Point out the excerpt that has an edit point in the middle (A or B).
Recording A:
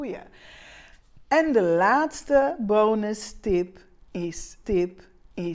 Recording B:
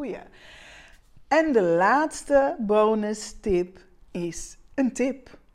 A